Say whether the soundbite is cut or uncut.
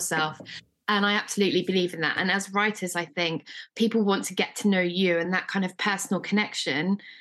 uncut